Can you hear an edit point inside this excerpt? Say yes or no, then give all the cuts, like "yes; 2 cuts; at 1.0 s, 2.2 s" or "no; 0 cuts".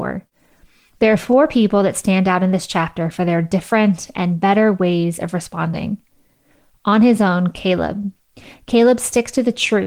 no; 0 cuts